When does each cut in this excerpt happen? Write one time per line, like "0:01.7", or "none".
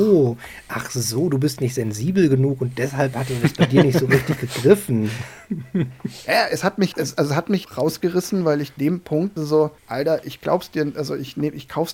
0:06.9
0:07.6
0:08.8
0:09.4
0:09.8